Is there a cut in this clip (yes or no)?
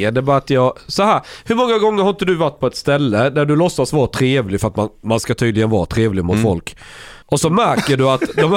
yes